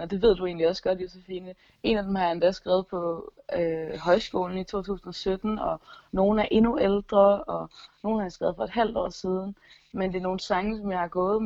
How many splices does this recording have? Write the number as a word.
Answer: zero